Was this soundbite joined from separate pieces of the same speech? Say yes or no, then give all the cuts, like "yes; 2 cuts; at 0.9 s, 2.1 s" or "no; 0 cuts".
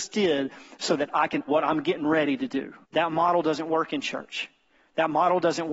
yes; 2 cuts; at 1.5 s, 2.8 s